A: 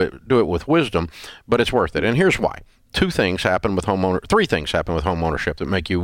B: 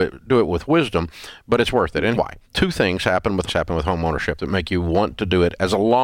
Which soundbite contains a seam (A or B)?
B